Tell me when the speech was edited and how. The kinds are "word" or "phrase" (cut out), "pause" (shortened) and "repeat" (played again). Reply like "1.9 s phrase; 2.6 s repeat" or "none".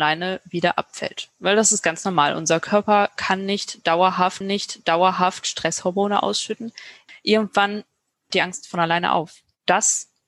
4.4 s repeat; 8.3 s word